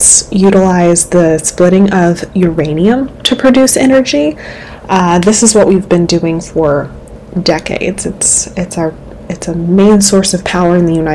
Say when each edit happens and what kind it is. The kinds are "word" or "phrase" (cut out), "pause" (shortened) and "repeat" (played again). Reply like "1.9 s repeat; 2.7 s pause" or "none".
none